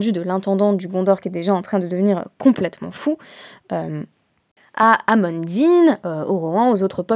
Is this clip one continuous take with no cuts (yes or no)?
yes